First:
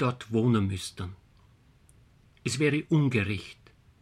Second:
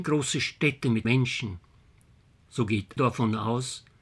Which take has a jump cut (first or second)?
second